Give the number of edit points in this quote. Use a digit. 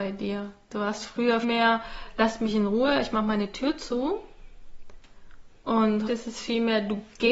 2